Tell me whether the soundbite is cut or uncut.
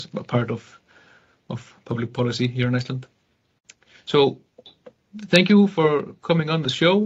uncut